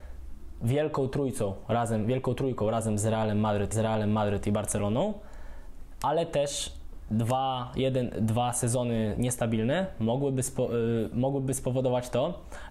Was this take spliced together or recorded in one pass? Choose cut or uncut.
cut